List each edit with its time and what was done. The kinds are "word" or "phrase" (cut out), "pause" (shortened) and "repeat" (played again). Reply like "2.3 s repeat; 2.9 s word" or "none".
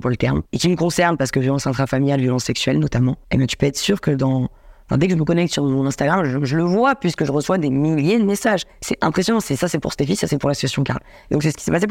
8.7 s pause